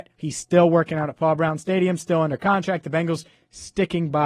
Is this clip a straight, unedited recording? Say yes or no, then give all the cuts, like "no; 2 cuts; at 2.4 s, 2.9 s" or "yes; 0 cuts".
yes; 0 cuts